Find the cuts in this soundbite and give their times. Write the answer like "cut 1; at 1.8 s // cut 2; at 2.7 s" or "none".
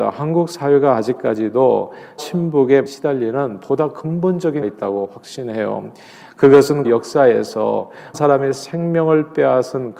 cut 1; at 2.2 s // cut 2; at 2.9 s // cut 3; at 4.6 s // cut 4; at 6.8 s // cut 5; at 8.1 s